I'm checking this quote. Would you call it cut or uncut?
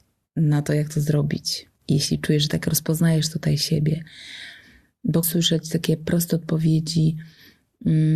cut